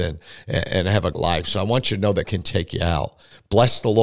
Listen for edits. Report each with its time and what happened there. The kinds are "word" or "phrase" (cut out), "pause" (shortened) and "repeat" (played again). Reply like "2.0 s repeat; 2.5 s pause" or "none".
1.1 s word; 2.2 s word